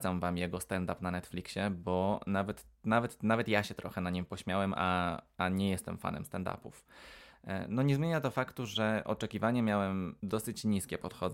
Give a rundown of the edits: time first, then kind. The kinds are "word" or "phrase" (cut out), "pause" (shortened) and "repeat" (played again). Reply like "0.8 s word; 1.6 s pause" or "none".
10.2 s pause